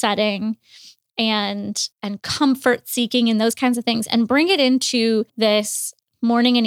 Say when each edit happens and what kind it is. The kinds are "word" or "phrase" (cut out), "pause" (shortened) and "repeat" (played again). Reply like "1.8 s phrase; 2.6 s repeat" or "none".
1.9 s pause; 5.3 s pause